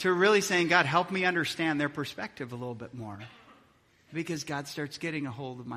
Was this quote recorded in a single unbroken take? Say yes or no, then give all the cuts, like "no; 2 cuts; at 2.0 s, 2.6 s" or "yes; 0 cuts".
yes; 0 cuts